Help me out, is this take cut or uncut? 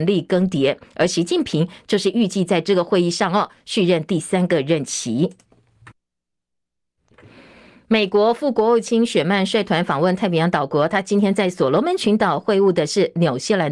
uncut